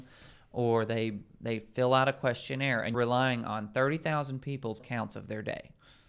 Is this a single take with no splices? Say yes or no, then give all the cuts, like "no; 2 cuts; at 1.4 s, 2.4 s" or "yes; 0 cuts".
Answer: no; 2 cuts; at 2.9 s, 4.8 s